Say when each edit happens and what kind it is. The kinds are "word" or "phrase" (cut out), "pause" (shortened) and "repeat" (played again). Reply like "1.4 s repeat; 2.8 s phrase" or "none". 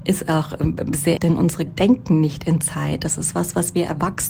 1.2 s word; 1.7 s word